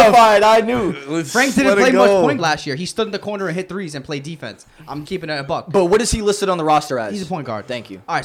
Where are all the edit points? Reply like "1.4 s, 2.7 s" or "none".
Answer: 2.4 s, 5.0 s